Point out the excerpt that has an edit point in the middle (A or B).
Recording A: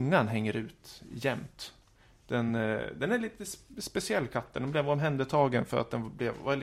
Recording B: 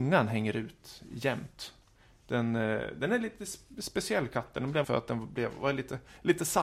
B